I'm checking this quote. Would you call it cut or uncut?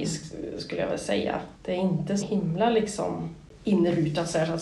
cut